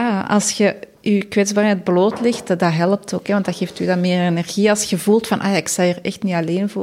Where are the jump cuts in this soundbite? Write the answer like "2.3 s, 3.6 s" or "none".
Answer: none